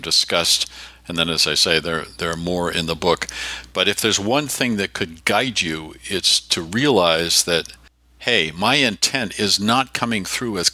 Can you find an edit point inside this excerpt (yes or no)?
no